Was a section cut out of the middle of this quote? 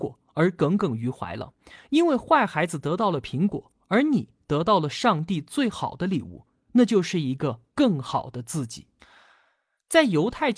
yes; 2 cuts; at 7.7 s, 9.0 s

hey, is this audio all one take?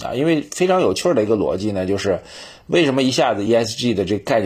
yes; 0 cuts

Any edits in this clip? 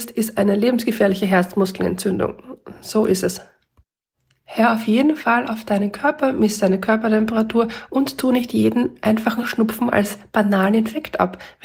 no; 0 cuts

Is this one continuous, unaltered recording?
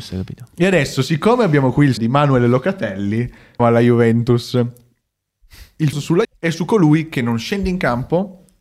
no; 4 cuts; at 2.0 s, 3.6 s, 5.9 s, 6.2 s

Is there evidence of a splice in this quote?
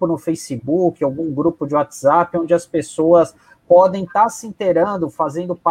no; 0 cuts

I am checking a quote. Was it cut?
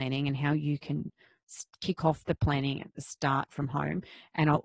no; 0 cuts

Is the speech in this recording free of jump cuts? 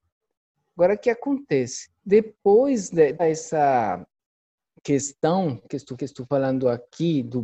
no; 3 cuts; at 2.0 s, 3.2 s, 6.0 s

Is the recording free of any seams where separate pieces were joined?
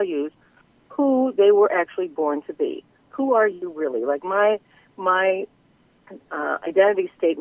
yes; 0 cuts

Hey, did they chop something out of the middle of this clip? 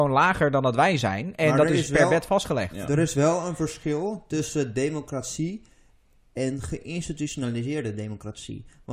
no; 0 cuts

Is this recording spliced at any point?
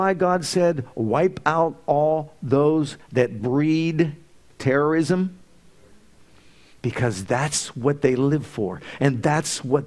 no; 0 cuts

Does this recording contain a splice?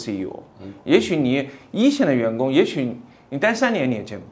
no; 0 cuts

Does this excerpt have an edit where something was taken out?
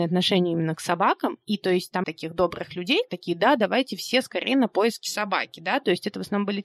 yes; 2 cuts; at 2.0 s, 3.1 s

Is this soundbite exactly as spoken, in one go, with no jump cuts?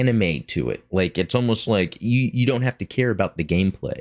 yes; 0 cuts

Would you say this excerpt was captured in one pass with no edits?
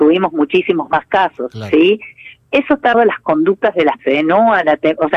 no; 2 cuts; at 2.9 s, 4.0 s

